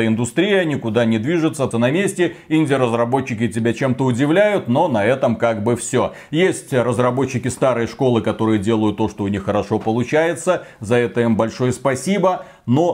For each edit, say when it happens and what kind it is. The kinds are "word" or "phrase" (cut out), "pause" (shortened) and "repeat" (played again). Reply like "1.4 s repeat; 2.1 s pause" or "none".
1.7 s word